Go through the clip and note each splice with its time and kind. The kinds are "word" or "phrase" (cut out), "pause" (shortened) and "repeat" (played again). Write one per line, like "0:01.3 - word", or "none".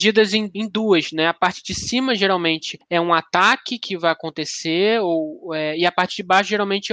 none

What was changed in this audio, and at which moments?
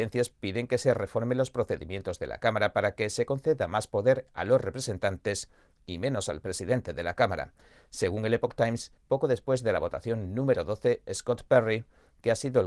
0:09.0 - pause

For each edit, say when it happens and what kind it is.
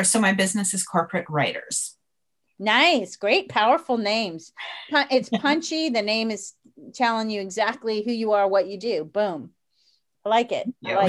none

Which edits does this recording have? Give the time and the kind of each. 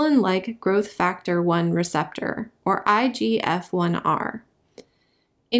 none

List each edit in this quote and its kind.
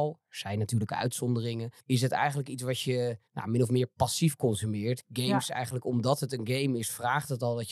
0:01.8 - pause
0:03.3 - pause

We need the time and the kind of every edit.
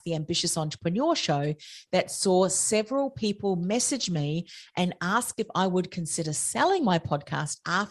none

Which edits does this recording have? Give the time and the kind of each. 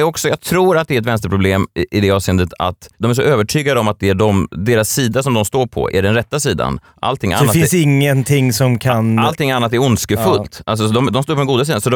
0:02.9 - pause
0:05.9 - word

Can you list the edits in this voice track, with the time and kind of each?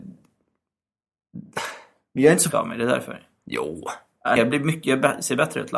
0:02.5 - word
0:04.4 - word

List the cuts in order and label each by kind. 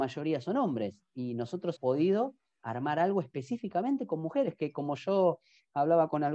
0:01.8 - word

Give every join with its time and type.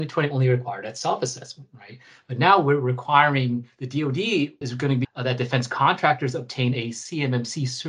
0:04.6 - word
0:05.0 - word

